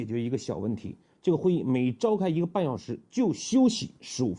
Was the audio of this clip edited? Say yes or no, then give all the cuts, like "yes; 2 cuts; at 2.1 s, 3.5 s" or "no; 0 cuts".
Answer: no; 0 cuts